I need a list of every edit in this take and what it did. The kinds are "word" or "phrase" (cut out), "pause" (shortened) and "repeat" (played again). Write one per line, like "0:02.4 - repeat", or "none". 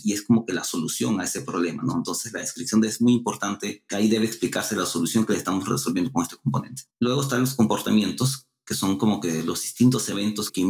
0:06.9 - pause